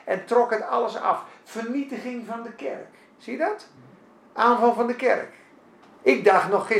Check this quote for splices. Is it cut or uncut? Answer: uncut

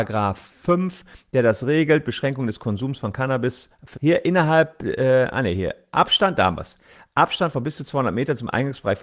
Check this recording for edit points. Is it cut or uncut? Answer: cut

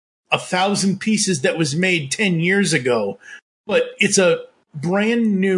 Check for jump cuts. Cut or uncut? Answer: uncut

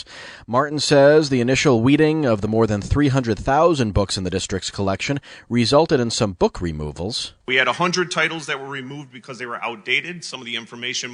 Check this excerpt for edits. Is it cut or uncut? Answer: cut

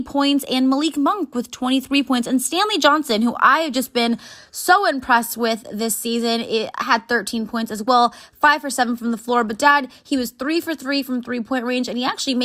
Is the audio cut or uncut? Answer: uncut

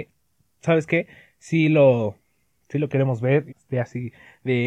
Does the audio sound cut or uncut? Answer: cut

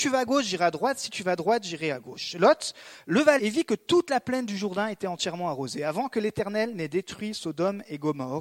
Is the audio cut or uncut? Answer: cut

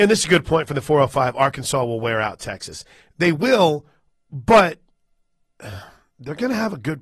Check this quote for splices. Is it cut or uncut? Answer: uncut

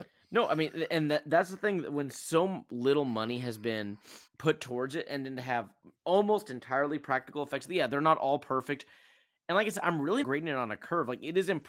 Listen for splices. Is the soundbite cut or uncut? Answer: cut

